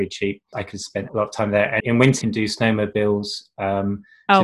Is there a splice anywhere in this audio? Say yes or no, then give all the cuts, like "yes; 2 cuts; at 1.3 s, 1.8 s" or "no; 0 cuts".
yes; 3 cuts; at 1.1 s, 1.8 s, 2.2 s